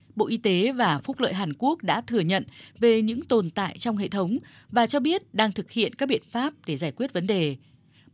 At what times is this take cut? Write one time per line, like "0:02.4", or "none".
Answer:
none